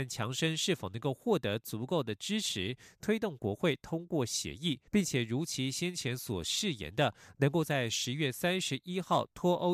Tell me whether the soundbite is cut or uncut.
cut